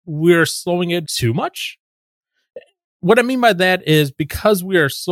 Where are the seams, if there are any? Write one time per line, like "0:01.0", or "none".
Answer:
0:01.0